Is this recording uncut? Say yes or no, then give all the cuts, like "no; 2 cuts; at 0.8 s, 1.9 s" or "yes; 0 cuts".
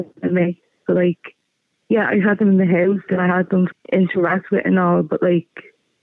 no; 2 cuts; at 3.1 s, 3.7 s